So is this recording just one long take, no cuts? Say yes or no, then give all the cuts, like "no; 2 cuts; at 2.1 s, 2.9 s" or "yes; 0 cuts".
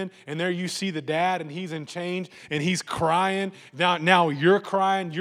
yes; 0 cuts